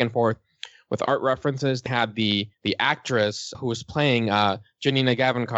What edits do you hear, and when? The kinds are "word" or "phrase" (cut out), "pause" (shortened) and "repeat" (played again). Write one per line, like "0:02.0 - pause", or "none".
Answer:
0:01.9 - word
0:02.5 - pause
0:03.5 - word